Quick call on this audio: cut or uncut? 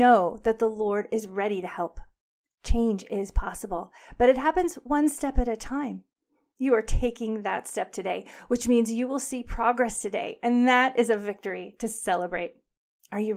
uncut